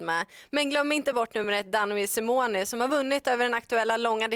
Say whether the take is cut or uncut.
uncut